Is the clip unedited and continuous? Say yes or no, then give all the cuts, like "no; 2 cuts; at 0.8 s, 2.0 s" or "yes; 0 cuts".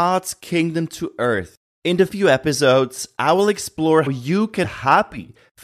no; 4 cuts; at 1.6 s, 2.1 s, 4.1 s, 4.6 s